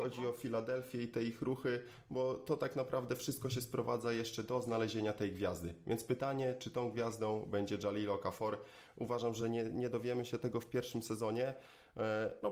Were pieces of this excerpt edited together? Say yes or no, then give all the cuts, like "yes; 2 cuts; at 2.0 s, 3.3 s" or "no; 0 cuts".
no; 0 cuts